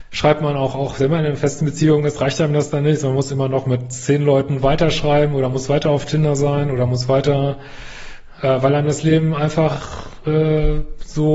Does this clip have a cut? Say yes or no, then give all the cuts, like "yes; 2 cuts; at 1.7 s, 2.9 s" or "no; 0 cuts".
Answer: no; 0 cuts